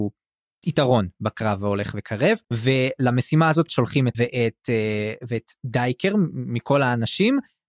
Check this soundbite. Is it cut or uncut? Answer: cut